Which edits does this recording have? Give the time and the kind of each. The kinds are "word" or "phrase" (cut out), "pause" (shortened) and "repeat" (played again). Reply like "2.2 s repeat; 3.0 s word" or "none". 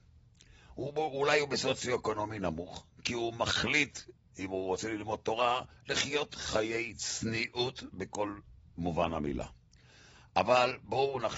none